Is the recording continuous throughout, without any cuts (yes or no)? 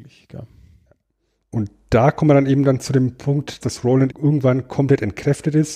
no